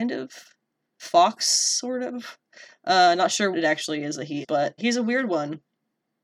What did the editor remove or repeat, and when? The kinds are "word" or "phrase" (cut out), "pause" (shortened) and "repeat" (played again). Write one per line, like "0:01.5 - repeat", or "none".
0:03.5 - word
0:04.4 - word
0:04.8 - word

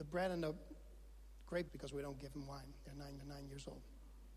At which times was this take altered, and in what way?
0:01.7 - word
0:03.2 - repeat

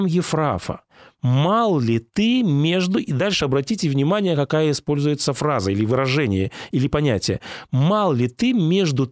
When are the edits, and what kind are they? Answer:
none

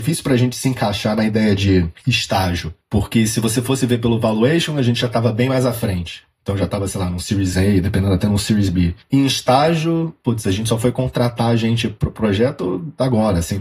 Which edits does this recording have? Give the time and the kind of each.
none

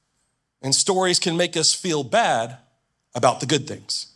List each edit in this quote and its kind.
none

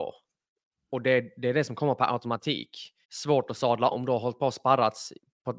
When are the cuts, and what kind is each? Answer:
0:03.0 - pause
0:03.9 - word

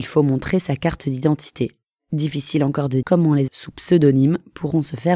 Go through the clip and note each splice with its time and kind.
0:03.0 - word
0:03.5 - word

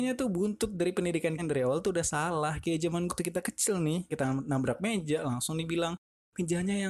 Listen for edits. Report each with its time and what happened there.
0:01.4 - word
0:03.1 - word
0:04.1 - word

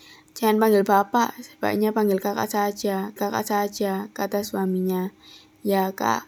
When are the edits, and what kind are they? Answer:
0:03.2 - repeat

